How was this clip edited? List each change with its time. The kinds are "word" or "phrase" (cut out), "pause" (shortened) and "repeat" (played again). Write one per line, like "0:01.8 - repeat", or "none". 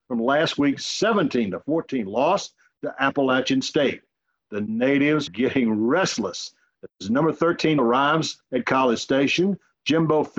0:05.3 - word
0:07.8 - word